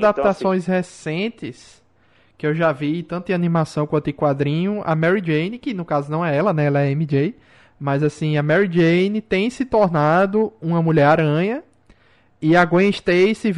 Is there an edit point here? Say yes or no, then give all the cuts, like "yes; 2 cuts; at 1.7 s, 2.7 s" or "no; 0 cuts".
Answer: no; 0 cuts